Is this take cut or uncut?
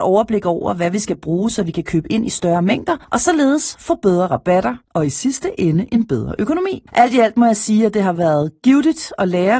cut